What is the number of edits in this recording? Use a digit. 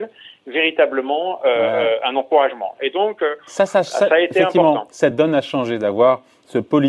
0